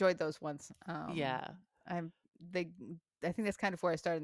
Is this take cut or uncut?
uncut